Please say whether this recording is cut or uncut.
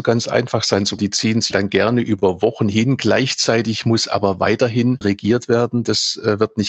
cut